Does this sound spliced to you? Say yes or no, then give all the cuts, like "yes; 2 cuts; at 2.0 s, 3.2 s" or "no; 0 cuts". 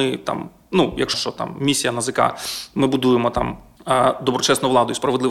yes; 1 cut; at 1.1 s